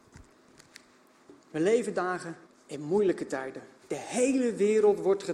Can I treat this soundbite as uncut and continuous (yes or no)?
no